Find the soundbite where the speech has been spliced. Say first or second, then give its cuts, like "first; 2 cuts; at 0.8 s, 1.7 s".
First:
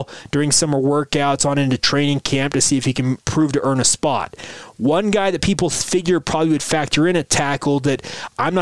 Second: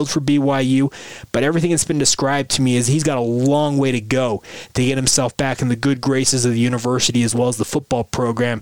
first; 1 cut; at 3.2 s